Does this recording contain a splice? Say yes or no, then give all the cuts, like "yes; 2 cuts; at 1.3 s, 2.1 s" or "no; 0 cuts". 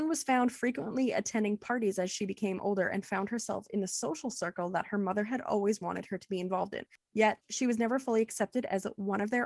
no; 0 cuts